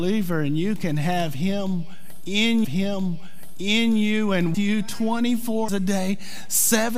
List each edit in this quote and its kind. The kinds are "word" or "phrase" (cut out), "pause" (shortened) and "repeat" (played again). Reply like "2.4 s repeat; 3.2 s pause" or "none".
2.6 s repeat; 4.5 s word; 5.7 s word